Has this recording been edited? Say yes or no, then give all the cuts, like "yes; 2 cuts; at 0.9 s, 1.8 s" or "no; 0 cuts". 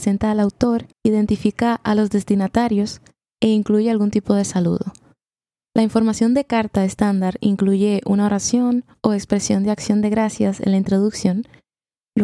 yes; 1 cut; at 0.9 s